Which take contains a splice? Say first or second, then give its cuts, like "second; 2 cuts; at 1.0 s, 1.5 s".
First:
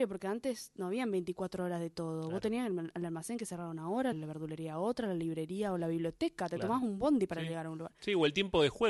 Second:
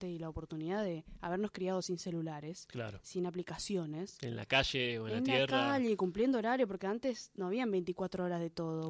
first; 1 cut; at 4.1 s